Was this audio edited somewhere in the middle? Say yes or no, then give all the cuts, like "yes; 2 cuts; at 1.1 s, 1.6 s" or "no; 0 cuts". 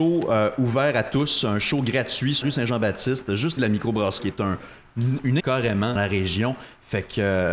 yes; 5 cuts; at 2.4 s, 3.6 s, 4.2 s, 5.4 s, 6.0 s